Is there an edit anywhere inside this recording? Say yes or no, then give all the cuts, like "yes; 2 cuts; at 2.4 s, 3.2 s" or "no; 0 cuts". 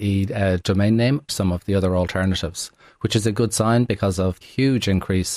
yes; 2 cuts; at 1.3 s, 4.4 s